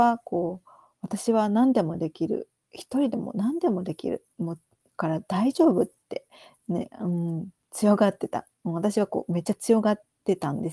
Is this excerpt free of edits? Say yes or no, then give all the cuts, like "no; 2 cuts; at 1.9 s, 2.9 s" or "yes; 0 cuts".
yes; 0 cuts